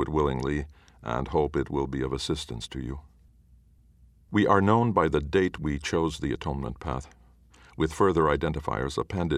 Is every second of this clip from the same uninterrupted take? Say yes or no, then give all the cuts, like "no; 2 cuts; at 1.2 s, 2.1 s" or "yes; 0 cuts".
yes; 0 cuts